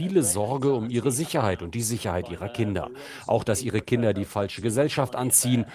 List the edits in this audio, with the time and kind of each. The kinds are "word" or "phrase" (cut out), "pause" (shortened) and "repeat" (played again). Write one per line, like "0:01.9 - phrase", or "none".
none